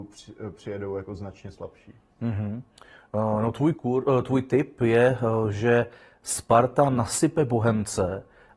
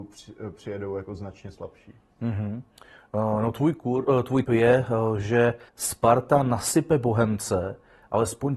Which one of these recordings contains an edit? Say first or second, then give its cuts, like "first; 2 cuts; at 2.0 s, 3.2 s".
second; 2 cuts; at 4.4 s, 5.7 s